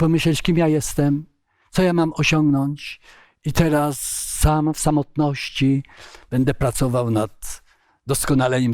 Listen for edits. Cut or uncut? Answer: uncut